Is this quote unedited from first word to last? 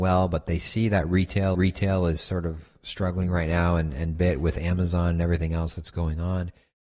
no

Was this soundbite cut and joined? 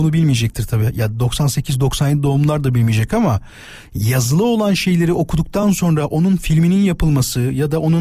no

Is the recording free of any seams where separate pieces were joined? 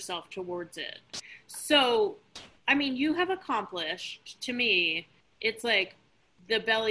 yes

